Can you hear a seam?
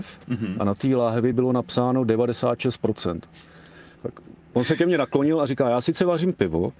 no; 0 cuts

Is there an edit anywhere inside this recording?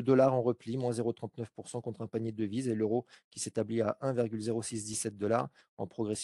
no; 0 cuts

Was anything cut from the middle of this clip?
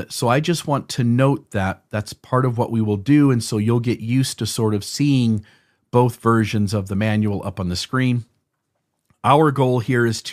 no; 0 cuts

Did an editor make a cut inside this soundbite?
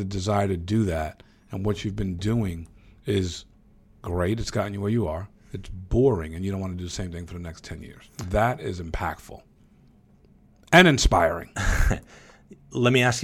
no; 0 cuts

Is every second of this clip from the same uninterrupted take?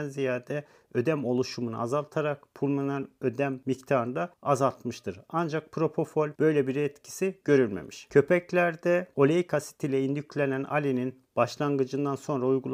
yes; 0 cuts

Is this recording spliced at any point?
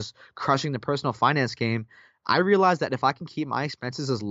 no; 0 cuts

